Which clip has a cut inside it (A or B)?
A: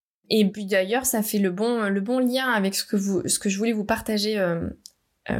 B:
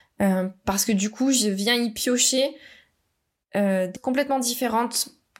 B